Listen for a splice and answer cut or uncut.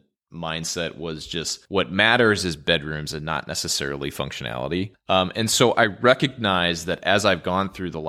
uncut